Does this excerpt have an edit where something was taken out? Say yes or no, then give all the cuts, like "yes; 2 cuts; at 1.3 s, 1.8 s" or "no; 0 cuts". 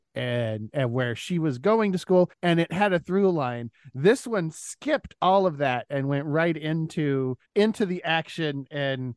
yes; 2 cuts; at 2.3 s, 7.5 s